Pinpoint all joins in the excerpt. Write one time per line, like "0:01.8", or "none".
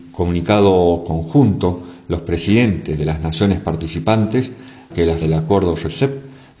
0:04.9
0:05.2

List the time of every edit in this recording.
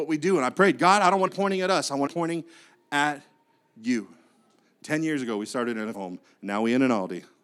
0:01.3
0:02.1
0:05.9

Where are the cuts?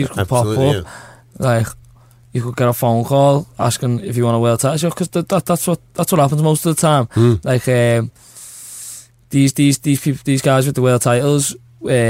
none

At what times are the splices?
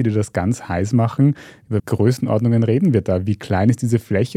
0:01.8

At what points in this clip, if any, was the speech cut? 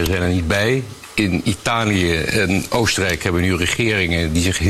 none

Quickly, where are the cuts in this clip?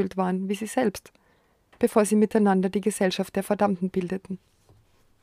none

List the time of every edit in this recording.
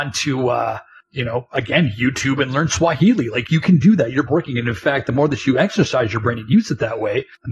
0:04.3

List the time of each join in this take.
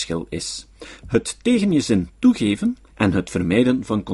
0:02.9

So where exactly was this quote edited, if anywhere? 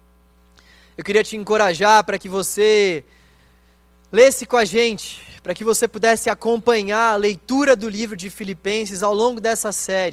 none

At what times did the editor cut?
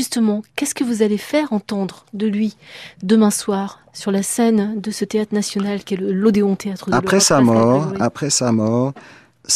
none

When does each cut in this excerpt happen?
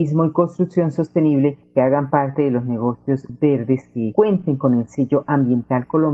0:04.1

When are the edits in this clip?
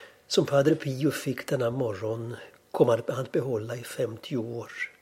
none

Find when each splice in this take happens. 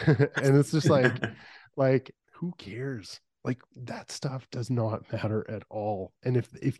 0:02.2

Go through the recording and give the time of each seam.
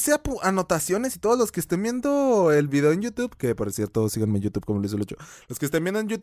none

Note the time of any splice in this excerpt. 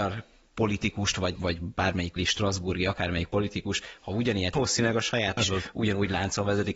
0:01.3
0:02.2
0:04.5
0:05.4

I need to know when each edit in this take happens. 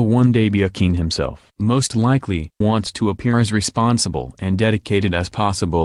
0:02.6

